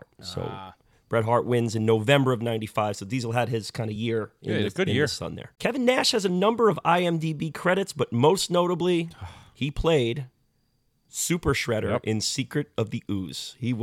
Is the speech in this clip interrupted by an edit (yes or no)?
no